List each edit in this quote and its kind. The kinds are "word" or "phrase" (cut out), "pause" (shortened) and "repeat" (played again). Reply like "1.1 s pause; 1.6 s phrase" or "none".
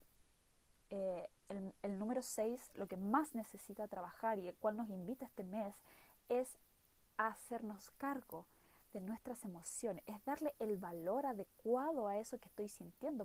none